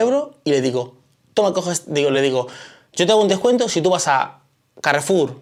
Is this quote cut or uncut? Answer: uncut